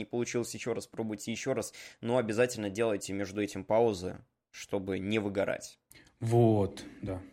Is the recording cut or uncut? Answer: uncut